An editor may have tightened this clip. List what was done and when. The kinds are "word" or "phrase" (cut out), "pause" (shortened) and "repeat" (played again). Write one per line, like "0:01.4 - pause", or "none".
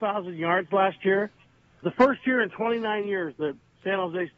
0:01.8 - word

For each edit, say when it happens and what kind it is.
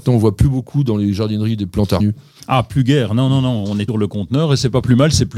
0:02.0 - word
0:03.9 - phrase

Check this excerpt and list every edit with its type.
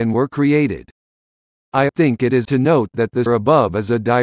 0:01.9 - word
0:02.4 - word
0:03.3 - word

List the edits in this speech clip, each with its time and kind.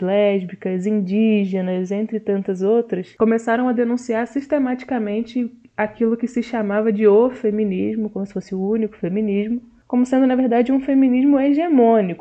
none

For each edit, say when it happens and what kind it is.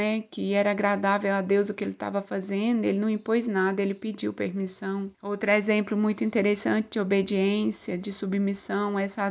0:05.1 - pause

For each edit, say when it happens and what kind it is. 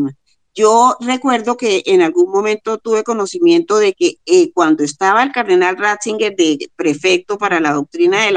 none

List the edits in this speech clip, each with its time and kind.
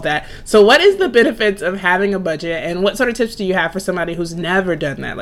none

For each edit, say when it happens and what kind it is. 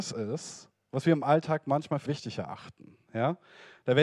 0:02.1 - word

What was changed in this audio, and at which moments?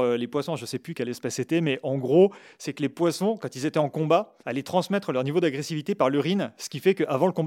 0:04.4 - pause

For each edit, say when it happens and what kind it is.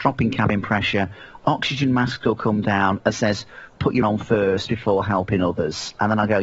0:03.1 - word
0:04.0 - word

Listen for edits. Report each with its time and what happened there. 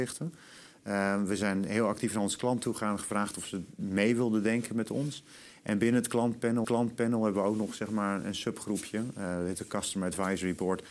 0:06.6 - repeat

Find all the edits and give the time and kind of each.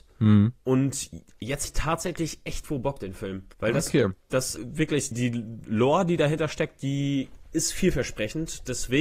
0:01.6 - word
0:03.0 - word
0:03.5 - pause
0:04.6 - word
0:05.1 - word

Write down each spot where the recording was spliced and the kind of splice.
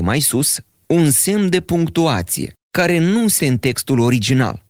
0:02.6 - pause
0:03.4 - word

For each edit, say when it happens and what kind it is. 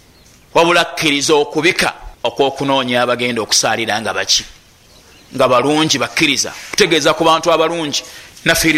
0:02.1 - pause

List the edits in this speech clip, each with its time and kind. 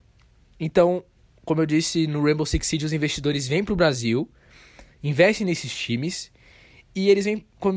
none

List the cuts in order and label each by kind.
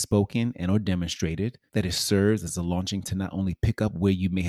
0:01.7 - pause
0:03.0 - word

